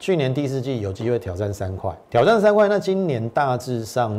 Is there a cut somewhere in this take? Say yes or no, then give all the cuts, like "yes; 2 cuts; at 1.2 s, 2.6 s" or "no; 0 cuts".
yes; 1 cut; at 2.0 s